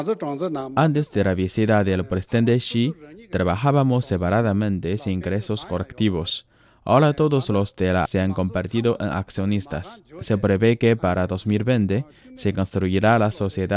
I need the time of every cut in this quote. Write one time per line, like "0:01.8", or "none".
0:08.0